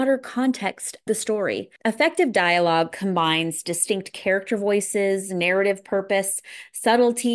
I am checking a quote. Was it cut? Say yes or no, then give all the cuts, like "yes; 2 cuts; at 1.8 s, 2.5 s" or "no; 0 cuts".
yes; 2 cuts; at 1.1 s, 1.8 s